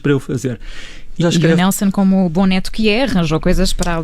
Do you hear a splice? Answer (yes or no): yes